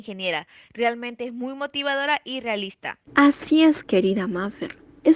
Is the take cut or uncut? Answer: cut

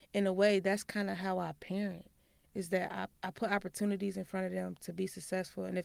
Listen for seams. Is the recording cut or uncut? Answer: cut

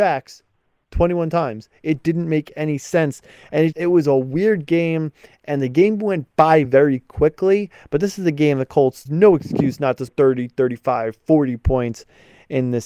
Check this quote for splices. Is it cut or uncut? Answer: cut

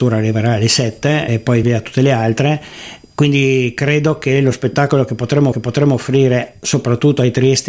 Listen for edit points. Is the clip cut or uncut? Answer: cut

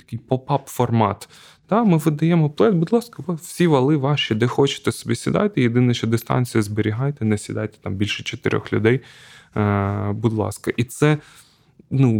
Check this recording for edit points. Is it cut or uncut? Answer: uncut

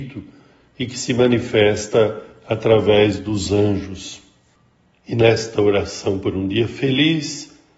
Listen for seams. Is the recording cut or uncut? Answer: uncut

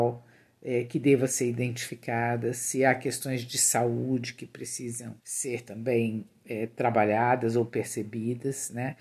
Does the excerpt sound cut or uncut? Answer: cut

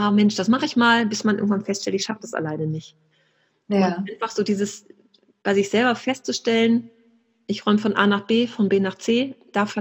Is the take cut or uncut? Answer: uncut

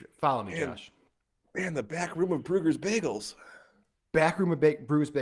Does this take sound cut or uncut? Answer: uncut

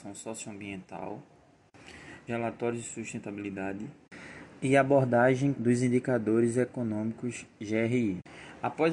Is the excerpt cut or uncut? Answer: cut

